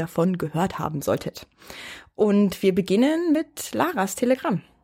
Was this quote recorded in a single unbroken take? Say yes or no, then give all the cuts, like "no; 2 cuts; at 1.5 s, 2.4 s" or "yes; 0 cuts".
yes; 0 cuts